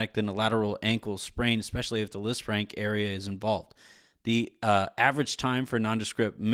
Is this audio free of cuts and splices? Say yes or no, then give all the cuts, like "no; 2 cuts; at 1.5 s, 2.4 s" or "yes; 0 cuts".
yes; 0 cuts